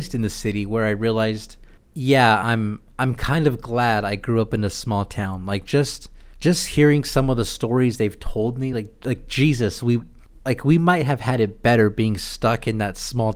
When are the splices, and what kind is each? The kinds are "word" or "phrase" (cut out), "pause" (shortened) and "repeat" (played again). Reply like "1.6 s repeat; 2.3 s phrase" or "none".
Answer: none